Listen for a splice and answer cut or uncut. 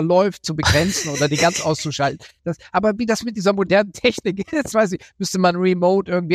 cut